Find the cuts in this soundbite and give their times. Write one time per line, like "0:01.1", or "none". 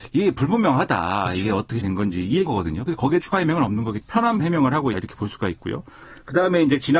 0:01.8
0:02.5
0:03.2
0:04.0
0:04.4
0:04.9